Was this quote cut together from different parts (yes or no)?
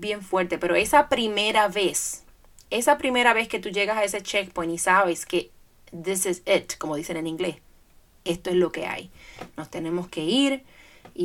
no